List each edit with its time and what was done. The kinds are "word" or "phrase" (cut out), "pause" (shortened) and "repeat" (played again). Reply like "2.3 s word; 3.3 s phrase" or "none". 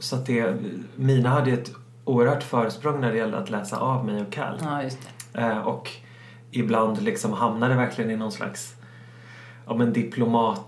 none

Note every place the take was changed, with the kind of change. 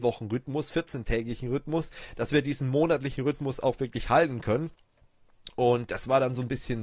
none

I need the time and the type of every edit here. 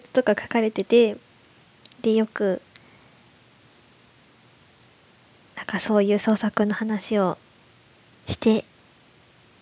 none

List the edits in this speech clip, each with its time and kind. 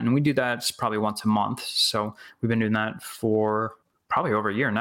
3.8 s pause

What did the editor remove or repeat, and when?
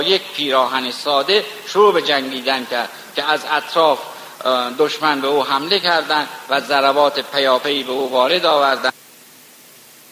none

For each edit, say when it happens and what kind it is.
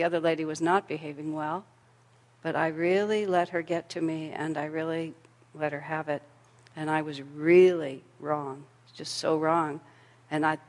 none

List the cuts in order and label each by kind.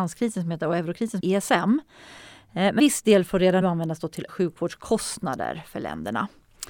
1.2 s word; 2.8 s word; 3.6 s word; 4.3 s word

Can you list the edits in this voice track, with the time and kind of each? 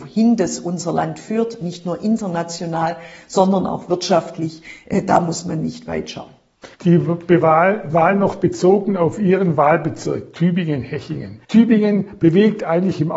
6.7 s pause; 11.4 s pause

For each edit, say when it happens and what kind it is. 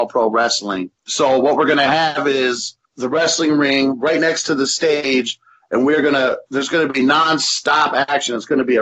1.0 s pause; 2.8 s pause; 6.5 s word

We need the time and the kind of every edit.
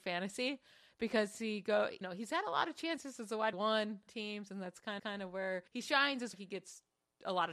2.0 s word; 3.5 s word; 4.1 s word; 5.0 s repeat; 5.7 s pause; 6.3 s word

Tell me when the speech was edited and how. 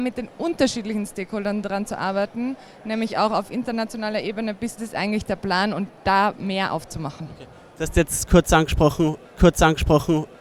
3.1 s word; 4.8 s phrase; 9.4 s repeat

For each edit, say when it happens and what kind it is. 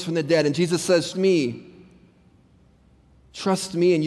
1.1 s word

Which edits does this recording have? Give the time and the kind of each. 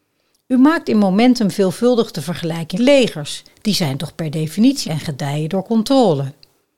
2.7 s word; 3.5 s pause; 4.8 s word

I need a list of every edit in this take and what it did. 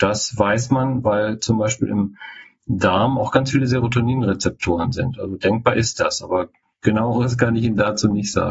6.6 s pause

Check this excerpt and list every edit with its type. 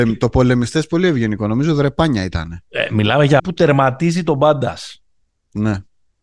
3.4 s phrase

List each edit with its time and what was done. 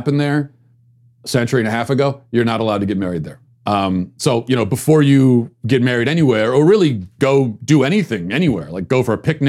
3.4 s pause; 7.1 s pause

